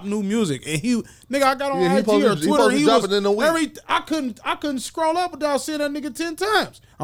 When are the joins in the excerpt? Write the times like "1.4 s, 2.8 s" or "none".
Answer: none